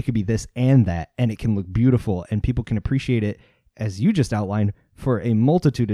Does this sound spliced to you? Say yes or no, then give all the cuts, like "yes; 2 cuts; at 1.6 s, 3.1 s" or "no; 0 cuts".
no; 0 cuts